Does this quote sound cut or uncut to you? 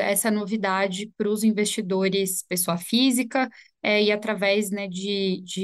uncut